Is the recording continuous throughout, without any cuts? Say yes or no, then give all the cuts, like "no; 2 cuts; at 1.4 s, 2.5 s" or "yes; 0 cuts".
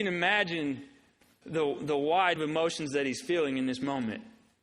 no; 2 cuts; at 1.4 s, 2.4 s